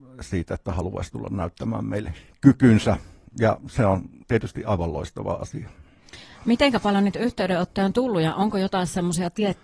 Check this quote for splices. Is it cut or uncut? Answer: uncut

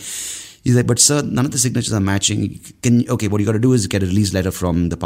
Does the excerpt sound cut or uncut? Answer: uncut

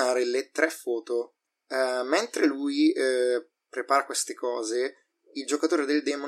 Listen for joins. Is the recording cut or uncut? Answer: uncut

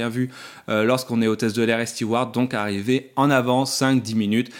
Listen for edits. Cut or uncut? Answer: uncut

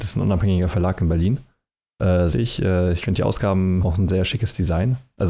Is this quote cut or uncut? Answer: cut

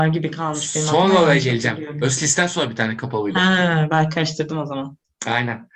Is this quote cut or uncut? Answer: uncut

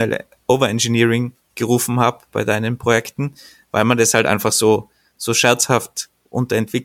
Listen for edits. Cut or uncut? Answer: uncut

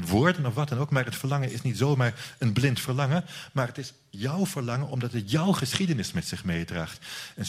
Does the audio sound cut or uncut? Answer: uncut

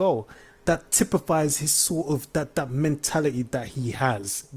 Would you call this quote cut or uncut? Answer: uncut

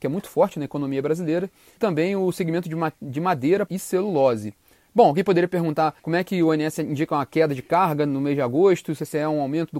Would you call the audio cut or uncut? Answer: cut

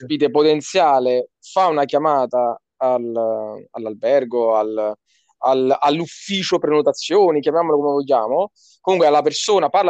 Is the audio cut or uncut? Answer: uncut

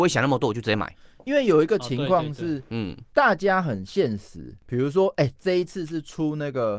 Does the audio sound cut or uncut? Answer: uncut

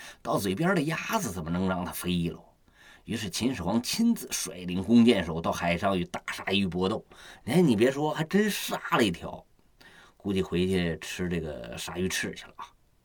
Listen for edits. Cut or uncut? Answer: uncut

